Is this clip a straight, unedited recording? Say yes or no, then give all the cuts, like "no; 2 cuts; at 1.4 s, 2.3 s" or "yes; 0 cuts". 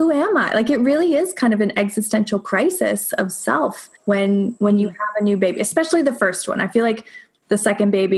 no; 1 cut; at 4.0 s